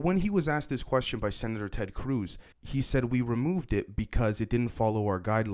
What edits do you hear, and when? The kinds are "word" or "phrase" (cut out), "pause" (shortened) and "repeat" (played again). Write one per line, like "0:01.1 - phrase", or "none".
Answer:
0:02.5 - pause